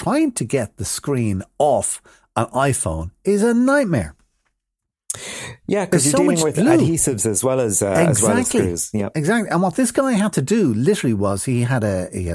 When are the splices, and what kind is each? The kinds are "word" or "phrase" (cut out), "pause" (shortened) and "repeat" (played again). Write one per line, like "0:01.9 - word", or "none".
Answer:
none